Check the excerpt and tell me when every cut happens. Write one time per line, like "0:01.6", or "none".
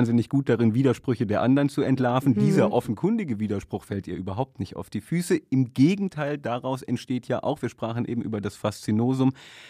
none